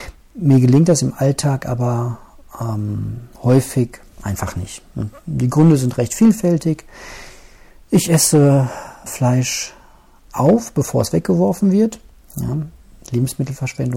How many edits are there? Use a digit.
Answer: 2